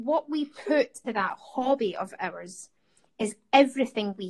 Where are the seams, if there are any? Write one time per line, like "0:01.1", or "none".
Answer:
0:01.1